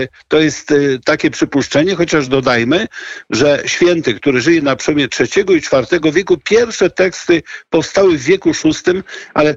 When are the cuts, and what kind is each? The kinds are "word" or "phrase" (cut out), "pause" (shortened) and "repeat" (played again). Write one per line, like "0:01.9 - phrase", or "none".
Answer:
none